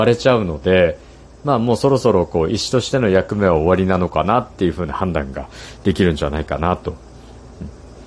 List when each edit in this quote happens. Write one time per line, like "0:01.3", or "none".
none